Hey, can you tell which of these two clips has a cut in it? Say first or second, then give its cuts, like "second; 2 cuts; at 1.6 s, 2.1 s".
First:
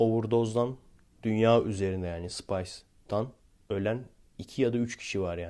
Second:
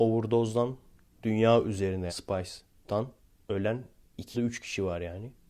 second; 2 cuts; at 2.1 s, 4.3 s